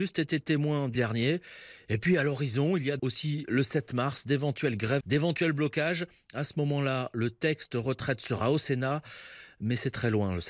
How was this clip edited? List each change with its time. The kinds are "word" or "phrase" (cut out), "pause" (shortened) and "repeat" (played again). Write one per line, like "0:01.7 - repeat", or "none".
0:01.0 - phrase
0:03.0 - word
0:05.0 - word